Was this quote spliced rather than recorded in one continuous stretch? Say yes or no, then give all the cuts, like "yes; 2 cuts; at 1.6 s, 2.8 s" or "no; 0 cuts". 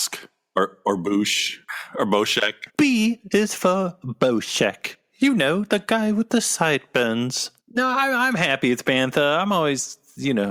yes; 2 cuts; at 2.7 s, 7.6 s